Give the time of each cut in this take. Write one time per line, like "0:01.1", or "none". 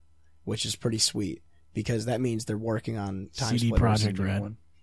none